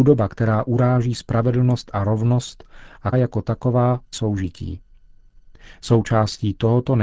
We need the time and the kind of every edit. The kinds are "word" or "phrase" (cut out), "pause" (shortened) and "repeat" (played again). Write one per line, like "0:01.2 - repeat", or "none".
0:03.1 - word
0:04.1 - phrase

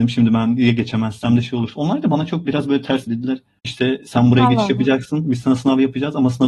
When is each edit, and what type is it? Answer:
0:02.5 - word
0:03.1 - word

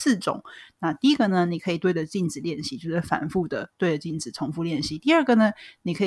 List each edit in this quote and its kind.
0:03.7 - pause

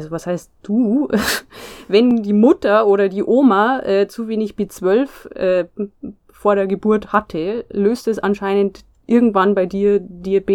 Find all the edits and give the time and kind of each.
none

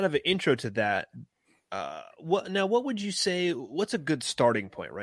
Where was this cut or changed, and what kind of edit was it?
none

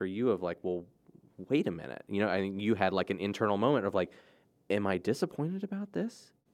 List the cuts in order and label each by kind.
none

